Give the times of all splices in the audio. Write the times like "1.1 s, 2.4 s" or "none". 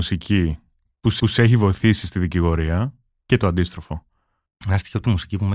1.2 s